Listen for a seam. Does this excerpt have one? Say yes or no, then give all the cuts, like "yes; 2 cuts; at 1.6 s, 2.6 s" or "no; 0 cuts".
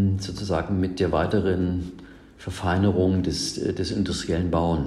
no; 0 cuts